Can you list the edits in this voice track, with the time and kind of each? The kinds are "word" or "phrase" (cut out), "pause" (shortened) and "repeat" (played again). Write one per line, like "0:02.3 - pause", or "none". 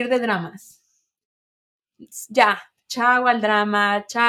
none